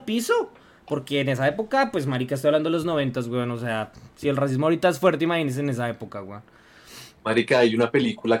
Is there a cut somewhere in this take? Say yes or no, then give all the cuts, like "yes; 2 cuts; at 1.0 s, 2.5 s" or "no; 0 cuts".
no; 0 cuts